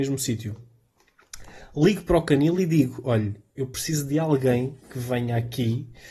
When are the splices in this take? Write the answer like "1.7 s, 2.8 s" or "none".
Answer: 4.8 s